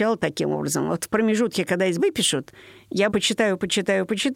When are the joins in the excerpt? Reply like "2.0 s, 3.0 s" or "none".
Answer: 2.0 s, 3.1 s